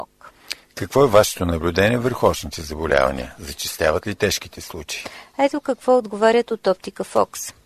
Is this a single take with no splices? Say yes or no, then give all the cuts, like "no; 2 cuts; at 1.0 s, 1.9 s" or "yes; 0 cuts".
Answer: yes; 0 cuts